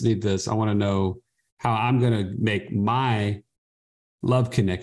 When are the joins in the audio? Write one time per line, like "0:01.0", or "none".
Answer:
none